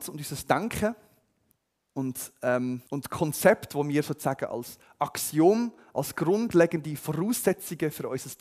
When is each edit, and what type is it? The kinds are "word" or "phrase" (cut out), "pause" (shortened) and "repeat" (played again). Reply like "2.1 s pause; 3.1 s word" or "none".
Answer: 1.5 s pause; 2.9 s pause